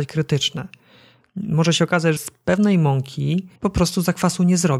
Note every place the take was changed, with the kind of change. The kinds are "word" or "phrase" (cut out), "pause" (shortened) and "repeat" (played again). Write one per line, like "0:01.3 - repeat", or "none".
0:02.2 - word
0:03.6 - pause